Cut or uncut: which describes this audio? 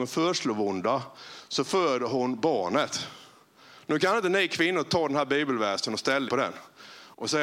cut